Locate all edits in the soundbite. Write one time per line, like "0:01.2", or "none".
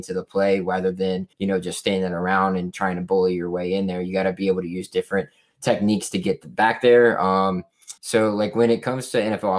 0:01.3
0:08.0